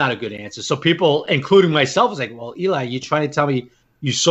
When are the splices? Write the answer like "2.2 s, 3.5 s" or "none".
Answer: none